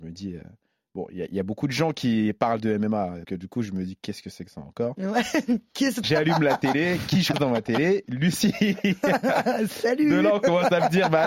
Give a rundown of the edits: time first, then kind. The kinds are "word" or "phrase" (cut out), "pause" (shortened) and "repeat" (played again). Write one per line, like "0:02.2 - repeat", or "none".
0:03.2 - word
0:06.0 - word
0:07.3 - word